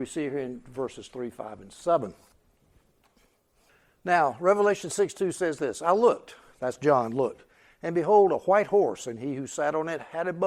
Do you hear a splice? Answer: no; 0 cuts

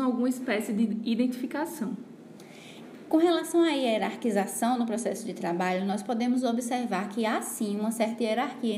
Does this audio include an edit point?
no; 0 cuts

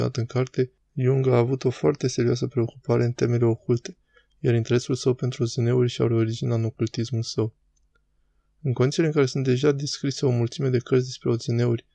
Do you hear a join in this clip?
no; 0 cuts

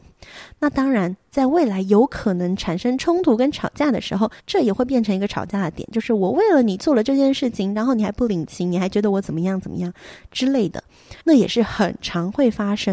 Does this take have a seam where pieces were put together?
yes; 2 cuts; at 4.4 s, 11.2 s

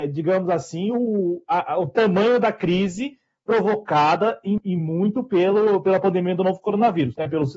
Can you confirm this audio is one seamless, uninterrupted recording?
yes; 0 cuts

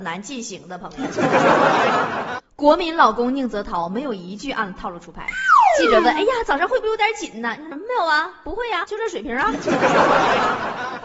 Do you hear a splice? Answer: yes; 2 cuts; at 7.7 s, 8.8 s

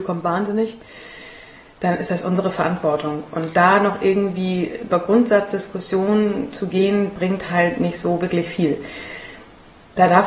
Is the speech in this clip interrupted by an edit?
no; 0 cuts

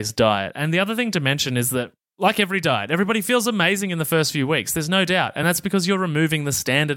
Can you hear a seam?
no; 0 cuts

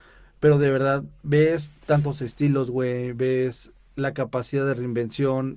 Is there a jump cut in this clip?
no; 0 cuts

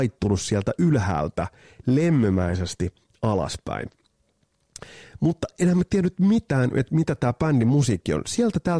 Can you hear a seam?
no; 0 cuts

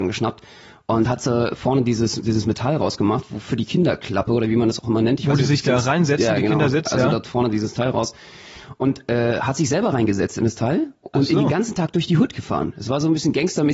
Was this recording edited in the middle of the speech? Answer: no; 0 cuts

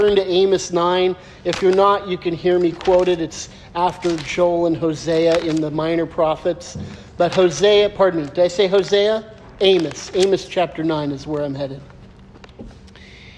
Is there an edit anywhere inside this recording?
no; 0 cuts

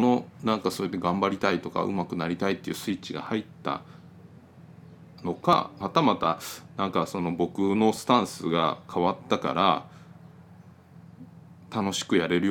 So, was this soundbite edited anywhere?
yes; 1 cut; at 5.8 s

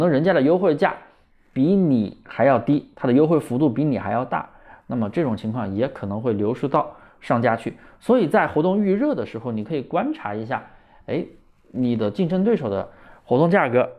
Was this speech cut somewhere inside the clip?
no; 0 cuts

